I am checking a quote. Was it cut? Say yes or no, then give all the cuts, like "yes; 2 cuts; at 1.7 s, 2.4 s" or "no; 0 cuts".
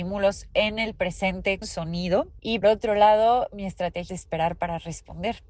yes; 3 cuts; at 1.6 s, 2.6 s, 4.1 s